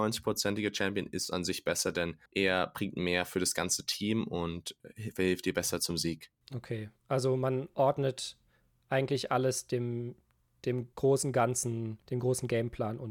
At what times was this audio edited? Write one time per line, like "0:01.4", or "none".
0:02.3
0:10.9
0:12.0